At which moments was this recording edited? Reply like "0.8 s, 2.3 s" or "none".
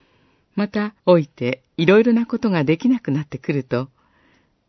1.0 s